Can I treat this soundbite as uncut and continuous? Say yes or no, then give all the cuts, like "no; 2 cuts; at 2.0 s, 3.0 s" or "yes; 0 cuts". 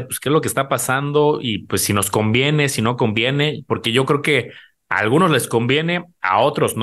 yes; 0 cuts